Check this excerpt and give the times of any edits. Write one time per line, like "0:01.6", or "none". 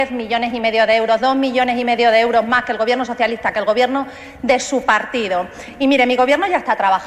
none